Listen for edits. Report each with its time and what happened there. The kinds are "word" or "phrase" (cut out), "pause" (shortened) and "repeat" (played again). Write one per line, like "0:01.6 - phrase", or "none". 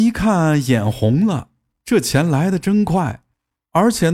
none